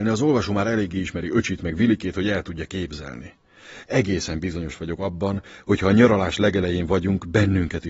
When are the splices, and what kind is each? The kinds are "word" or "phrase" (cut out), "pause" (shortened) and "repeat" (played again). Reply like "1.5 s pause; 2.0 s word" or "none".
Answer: none